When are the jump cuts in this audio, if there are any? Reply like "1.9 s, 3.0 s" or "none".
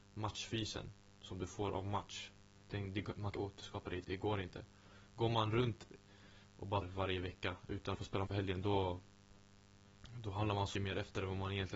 3.4 s, 4.0 s, 6.8 s, 8.0 s, 8.3 s, 10.8 s